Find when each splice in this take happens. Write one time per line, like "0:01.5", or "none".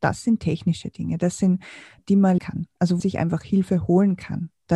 0:02.0
0:02.4
0:03.0